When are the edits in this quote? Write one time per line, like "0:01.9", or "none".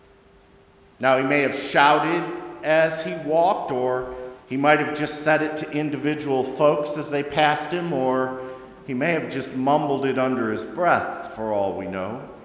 0:04.4